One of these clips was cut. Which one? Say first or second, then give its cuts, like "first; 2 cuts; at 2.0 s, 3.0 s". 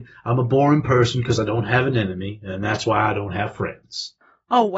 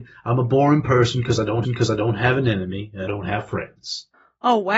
second; 2 cuts; at 1.6 s, 3.1 s